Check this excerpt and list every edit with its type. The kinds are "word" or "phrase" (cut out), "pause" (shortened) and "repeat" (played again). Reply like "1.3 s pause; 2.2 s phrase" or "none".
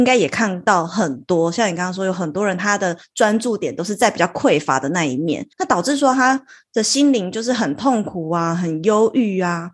5.5 s pause